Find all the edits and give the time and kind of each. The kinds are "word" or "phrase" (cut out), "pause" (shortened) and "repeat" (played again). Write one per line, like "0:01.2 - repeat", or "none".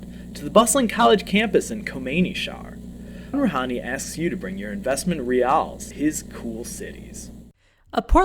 0:03.3 - word
0:05.9 - word